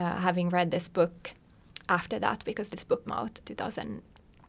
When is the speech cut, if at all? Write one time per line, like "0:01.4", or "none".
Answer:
0:03.1
0:03.4